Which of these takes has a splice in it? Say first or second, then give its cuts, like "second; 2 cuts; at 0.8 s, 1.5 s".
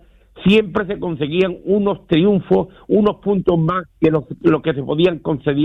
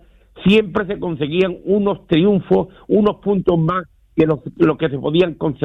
first; 1 cut; at 3.9 s